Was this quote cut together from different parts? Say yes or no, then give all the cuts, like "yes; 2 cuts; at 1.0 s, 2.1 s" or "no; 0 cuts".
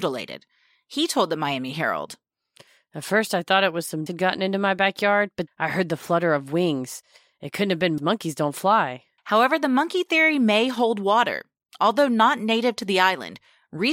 yes; 4 cuts; at 4.1 s, 5.5 s, 8.0 s, 9.2 s